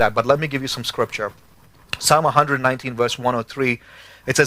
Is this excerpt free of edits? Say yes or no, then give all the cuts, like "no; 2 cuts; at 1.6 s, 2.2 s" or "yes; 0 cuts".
yes; 0 cuts